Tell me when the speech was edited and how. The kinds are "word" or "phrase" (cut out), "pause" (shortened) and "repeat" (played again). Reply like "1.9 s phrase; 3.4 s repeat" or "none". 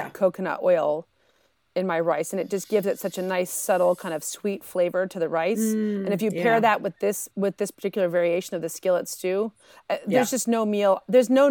none